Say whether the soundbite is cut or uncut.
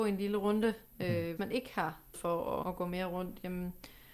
cut